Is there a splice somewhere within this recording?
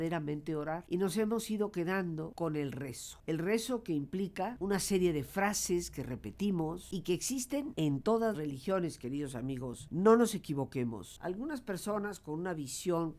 yes; 1 cut; at 8.3 s

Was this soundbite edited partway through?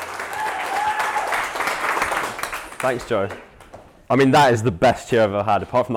no; 0 cuts

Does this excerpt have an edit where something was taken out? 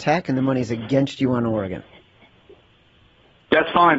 no; 0 cuts

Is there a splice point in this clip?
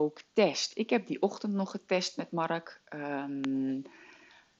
no; 0 cuts

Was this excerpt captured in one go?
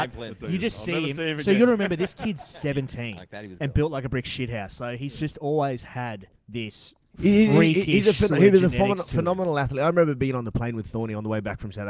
no; 1 cut; at 6.4 s

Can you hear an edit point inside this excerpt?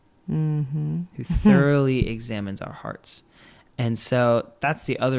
no; 0 cuts

